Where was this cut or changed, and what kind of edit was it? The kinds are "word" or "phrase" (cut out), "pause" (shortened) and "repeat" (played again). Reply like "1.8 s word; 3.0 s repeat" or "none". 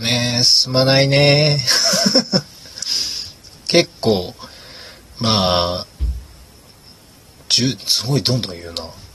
none